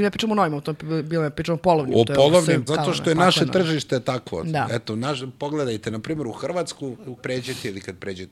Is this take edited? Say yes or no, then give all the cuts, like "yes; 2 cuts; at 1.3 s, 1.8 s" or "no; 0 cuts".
yes; 2 cuts; at 2.7 s, 7.2 s